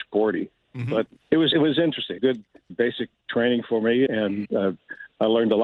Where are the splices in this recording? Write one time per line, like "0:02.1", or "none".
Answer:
0:01.2
0:01.5
0:02.2
0:02.7
0:04.1
0:04.5